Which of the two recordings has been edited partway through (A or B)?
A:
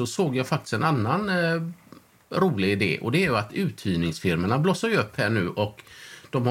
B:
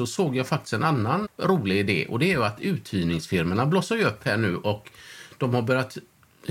B